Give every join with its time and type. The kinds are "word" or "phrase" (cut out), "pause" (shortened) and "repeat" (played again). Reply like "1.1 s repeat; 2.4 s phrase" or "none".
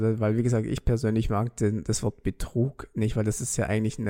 none